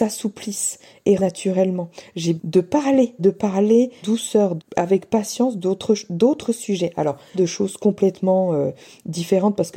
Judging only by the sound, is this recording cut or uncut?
cut